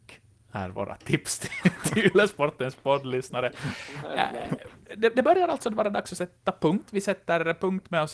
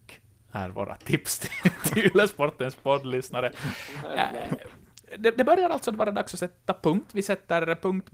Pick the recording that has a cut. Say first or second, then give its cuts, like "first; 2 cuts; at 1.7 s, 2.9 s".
first; 1 cut; at 4.8 s